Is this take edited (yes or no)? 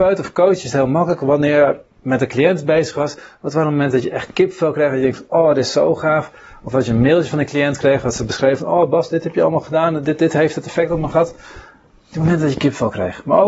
no